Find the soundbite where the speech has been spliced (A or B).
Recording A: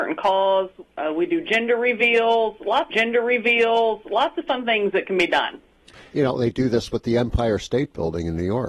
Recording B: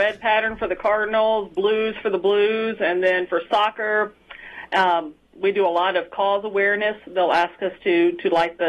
A